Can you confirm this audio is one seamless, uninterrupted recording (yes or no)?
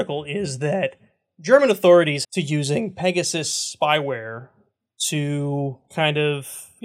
no